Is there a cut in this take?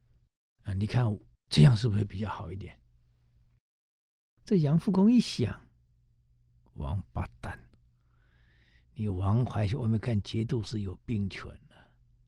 no; 0 cuts

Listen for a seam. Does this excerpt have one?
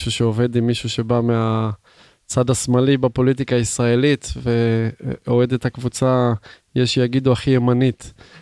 no; 0 cuts

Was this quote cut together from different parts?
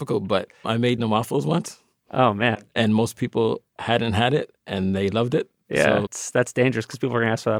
yes; 3 cuts; at 1.0 s, 4.6 s, 6.1 s

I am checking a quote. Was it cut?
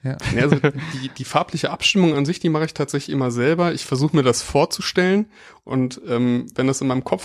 no; 0 cuts

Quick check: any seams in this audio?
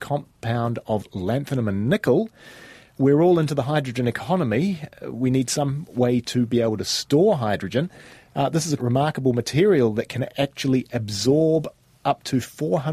yes; 1 cut; at 8.8 s

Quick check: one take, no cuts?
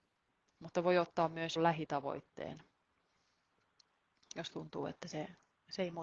no; 1 cut; at 1.6 s

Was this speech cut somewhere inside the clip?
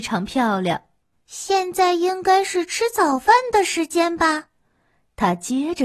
yes; 1 cut; at 1.0 s

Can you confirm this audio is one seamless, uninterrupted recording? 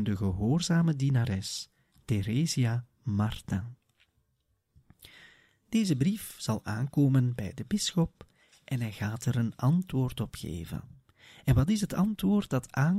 yes; 0 cuts

